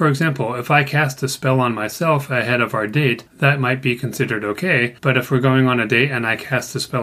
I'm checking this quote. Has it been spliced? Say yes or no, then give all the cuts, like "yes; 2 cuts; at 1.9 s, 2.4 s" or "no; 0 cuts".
yes; 2 cuts; at 3.3 s, 5.0 s